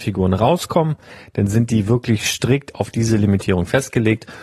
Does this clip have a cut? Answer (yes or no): no